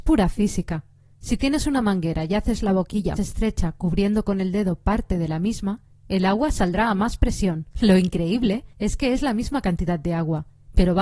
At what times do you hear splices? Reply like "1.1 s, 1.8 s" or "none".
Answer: 3.2 s, 7.7 s, 8.7 s